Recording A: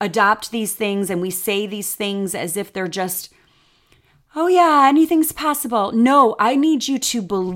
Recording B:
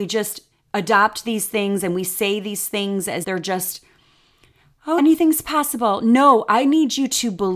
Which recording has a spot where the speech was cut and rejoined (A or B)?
B